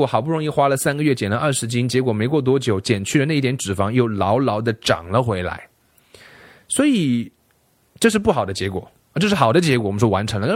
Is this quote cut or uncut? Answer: uncut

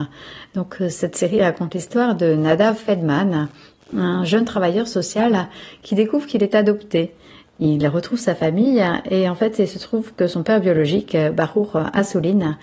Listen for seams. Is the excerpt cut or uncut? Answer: uncut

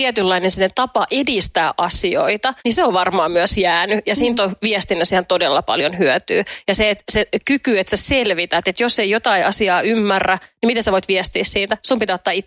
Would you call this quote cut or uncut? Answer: cut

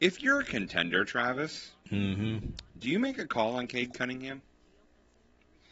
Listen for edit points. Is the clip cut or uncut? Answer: cut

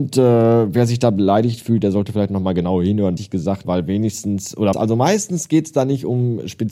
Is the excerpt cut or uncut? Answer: cut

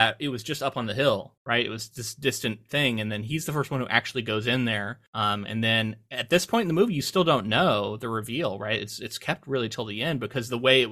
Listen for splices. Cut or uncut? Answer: cut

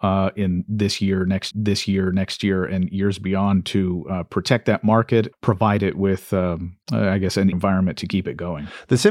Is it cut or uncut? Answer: cut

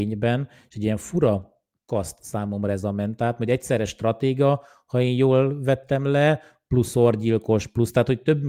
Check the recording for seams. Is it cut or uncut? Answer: uncut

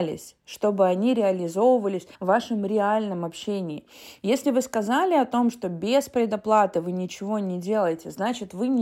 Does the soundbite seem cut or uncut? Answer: cut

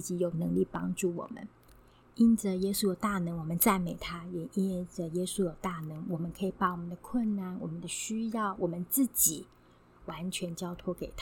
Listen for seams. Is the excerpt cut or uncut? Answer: uncut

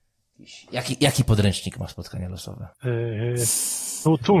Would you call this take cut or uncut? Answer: uncut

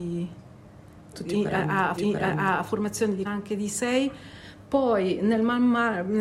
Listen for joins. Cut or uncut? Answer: cut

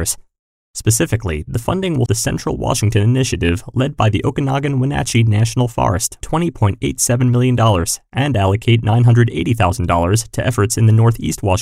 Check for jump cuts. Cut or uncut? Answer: cut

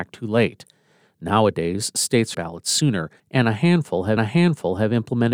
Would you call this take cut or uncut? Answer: cut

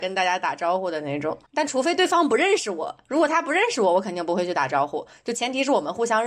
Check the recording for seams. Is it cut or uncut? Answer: cut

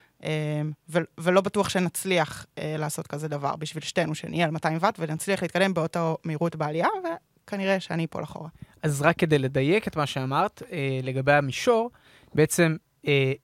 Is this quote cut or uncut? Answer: uncut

